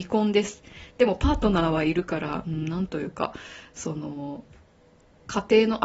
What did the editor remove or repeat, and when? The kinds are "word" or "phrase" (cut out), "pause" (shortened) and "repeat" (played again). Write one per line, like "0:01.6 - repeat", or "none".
none